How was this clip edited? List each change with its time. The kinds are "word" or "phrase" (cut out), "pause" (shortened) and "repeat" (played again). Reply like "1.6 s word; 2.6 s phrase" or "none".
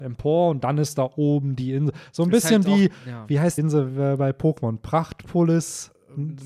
3.6 s word